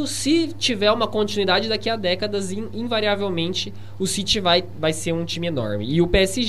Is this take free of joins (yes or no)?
yes